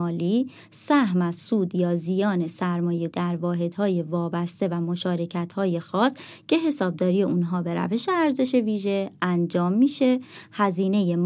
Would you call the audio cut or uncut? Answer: cut